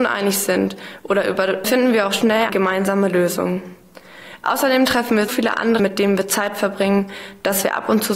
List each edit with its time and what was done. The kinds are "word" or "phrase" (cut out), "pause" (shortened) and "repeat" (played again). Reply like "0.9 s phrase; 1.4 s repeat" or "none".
1.6 s phrase; 2.5 s word; 5.3 s word; 5.8 s word